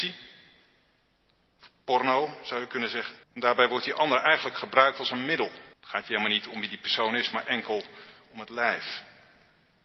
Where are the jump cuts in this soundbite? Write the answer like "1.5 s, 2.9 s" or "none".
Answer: 3.2 s, 5.7 s